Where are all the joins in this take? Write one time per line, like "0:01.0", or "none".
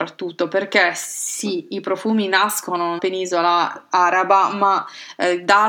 0:03.0